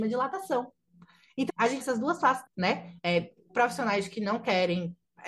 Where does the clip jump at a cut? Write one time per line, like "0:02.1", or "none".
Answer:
0:01.5
0:01.8
0:02.5
0:03.5